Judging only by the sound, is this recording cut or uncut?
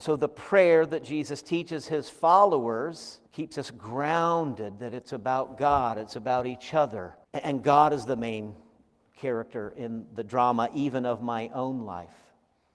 cut